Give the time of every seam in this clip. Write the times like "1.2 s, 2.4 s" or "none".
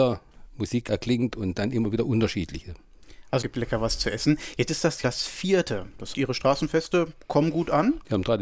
3.4 s, 5.0 s, 6.1 s

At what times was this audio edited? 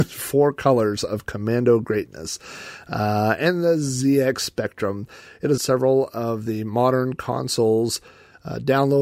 5.6 s

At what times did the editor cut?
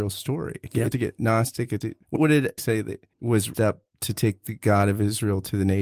0.9 s, 1.8 s, 2.2 s, 2.6 s, 3.1 s, 3.5 s

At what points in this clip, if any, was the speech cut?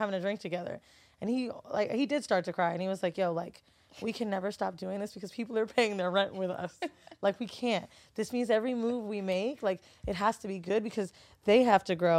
none

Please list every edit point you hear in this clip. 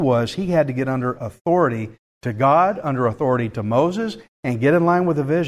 none

